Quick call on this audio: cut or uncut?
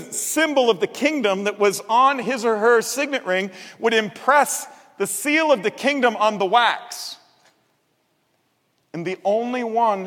uncut